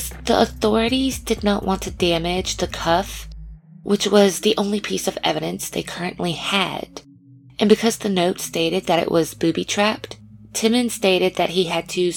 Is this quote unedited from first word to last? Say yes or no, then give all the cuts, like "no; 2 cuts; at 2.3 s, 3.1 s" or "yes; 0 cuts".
yes; 0 cuts